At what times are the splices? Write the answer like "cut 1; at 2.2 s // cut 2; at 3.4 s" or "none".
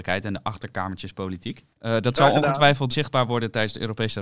cut 1; at 1.7 s // cut 2; at 2.9 s